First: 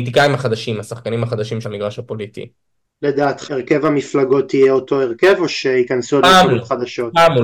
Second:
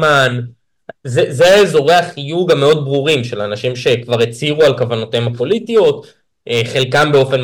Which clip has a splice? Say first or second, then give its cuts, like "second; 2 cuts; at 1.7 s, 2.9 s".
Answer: first; 2 cuts; at 1.6 s, 3.5 s